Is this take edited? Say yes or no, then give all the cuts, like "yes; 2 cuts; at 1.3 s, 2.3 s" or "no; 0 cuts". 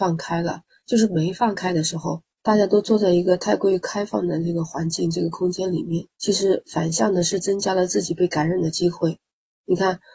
yes; 2 cuts; at 2.3 s, 6.1 s